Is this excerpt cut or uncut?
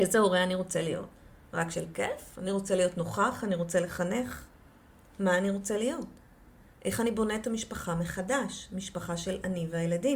uncut